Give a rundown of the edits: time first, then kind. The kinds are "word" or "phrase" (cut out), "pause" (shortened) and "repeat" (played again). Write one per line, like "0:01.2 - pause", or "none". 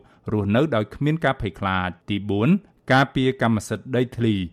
0:02.0 - pause